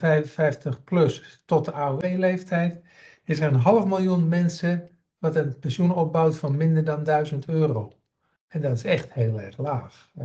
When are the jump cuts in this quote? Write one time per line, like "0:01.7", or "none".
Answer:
none